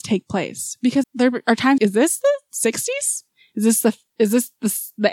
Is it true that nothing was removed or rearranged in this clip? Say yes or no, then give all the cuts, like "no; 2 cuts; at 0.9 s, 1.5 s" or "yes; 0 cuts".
no; 2 cuts; at 1.0 s, 1.8 s